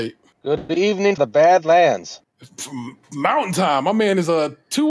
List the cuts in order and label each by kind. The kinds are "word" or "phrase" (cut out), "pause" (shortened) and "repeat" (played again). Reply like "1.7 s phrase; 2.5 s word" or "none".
1.2 s word

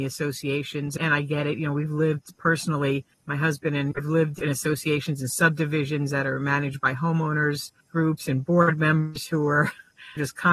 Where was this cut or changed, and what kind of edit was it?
3.1 s pause; 7.8 s pause

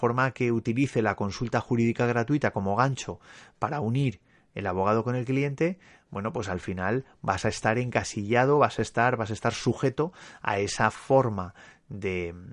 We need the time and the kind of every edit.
none

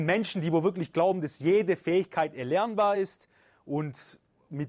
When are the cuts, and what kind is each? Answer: none

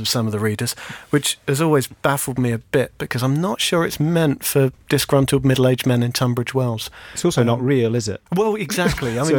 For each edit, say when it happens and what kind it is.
none

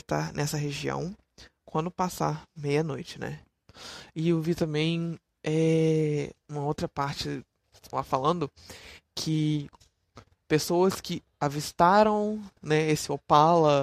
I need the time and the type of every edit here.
none

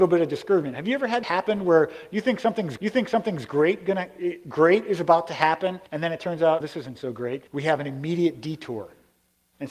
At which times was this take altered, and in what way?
1.2 s word; 2.8 s repeat; 5.9 s pause; 6.6 s word; 7.5 s pause

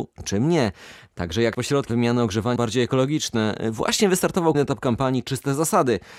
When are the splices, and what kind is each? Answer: 1.5 s word; 1.9 s word; 2.6 s word; 4.5 s word

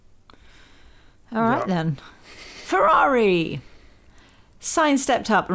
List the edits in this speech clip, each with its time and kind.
none

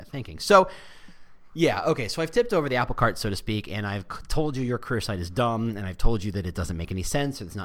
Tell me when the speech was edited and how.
none

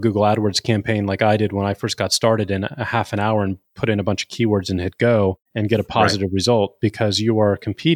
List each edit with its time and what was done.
5.5 s pause

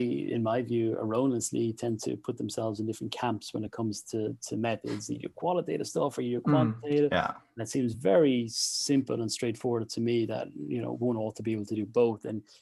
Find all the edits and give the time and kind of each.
none

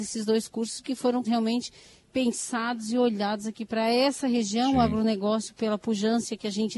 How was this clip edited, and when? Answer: 1.2 s word

